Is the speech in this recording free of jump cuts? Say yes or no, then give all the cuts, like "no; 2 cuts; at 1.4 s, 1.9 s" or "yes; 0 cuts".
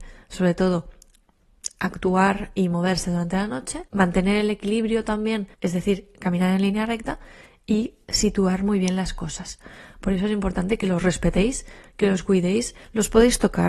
no; 2 cuts; at 3.9 s, 5.5 s